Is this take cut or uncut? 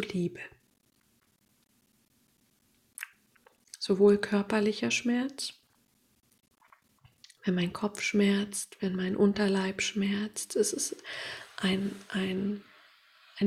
uncut